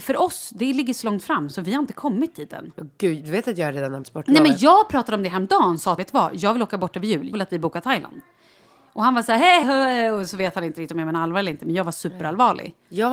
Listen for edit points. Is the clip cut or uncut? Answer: cut